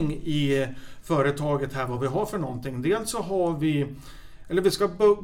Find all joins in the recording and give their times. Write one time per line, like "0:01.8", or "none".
none